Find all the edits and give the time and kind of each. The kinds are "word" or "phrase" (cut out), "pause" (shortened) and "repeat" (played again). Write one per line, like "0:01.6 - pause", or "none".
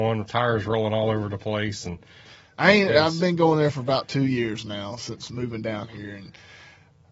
none